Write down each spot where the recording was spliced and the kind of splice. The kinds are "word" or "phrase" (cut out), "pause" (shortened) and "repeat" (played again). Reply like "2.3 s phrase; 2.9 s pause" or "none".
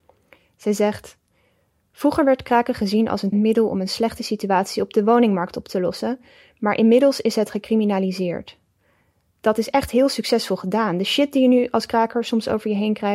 3.3 s word